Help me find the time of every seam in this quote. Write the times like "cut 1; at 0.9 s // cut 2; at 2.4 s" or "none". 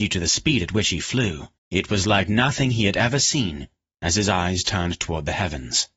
cut 1; at 1.6 s